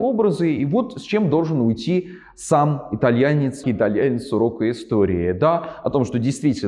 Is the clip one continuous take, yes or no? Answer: no